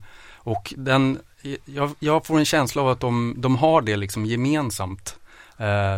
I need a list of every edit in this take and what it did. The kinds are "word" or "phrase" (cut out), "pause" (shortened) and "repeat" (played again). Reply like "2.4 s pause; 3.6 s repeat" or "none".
none